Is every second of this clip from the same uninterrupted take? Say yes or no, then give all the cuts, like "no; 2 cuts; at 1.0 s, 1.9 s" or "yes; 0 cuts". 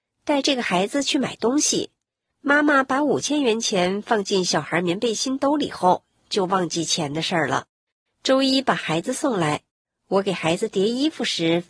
yes; 0 cuts